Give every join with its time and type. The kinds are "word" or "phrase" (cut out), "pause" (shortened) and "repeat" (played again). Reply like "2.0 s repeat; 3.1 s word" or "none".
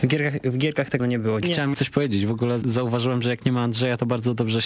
1.0 s word; 1.4 s word; 1.7 s word; 2.6 s word